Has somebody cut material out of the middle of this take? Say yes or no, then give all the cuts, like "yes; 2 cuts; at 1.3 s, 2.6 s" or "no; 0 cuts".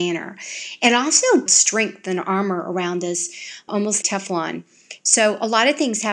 yes; 3 cuts; at 1.5 s, 3.7 s, 4.0 s